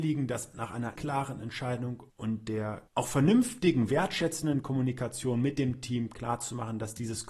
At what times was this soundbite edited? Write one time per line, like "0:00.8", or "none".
0:01.0
0:02.1
0:02.9

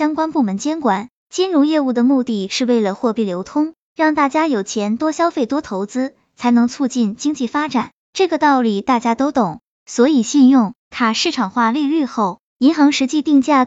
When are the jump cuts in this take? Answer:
0:10.8

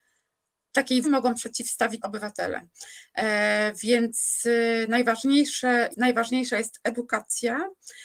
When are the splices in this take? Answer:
0:01.0
0:02.0
0:05.9

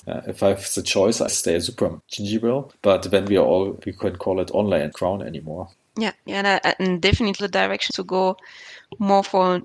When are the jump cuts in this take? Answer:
0:01.3
0:03.8
0:04.9
0:06.3
0:07.4
0:07.9

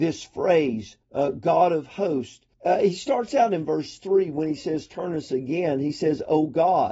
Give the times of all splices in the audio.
0:01.0
0:02.5

